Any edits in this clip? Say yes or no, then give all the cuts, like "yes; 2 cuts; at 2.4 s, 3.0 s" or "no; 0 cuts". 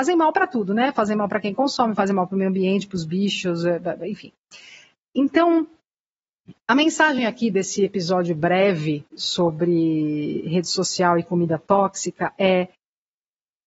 no; 0 cuts